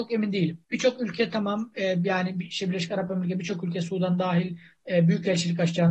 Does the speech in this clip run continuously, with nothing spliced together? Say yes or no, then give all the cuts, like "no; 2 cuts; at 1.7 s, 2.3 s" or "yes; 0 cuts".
yes; 0 cuts